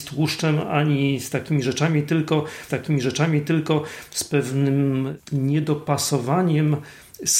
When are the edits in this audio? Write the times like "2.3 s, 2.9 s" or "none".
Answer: 2.7 s